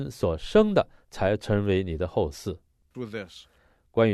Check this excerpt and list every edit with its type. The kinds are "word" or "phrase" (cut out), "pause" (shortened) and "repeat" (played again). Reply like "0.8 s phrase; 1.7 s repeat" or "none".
2.9 s phrase